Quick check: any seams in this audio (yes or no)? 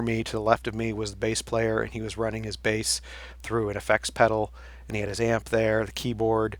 no